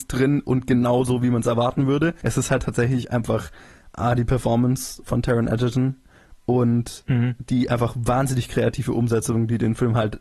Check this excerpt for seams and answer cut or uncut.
uncut